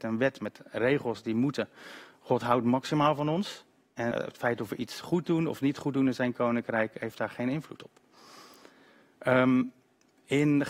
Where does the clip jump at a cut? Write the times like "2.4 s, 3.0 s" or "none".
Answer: 4.1 s